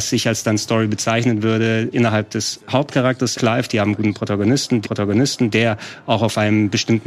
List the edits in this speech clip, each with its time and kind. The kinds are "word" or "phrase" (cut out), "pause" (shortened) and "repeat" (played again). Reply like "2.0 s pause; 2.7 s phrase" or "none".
1.9 s word; 3.3 s phrase; 4.8 s repeat